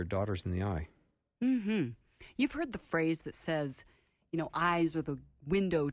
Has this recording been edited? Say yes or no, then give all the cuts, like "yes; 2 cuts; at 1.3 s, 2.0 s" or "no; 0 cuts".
no; 0 cuts